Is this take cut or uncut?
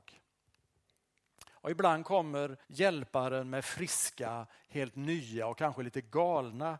cut